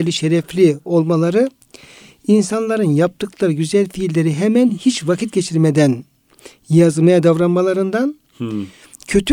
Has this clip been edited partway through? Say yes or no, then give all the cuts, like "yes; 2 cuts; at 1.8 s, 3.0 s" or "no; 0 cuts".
no; 0 cuts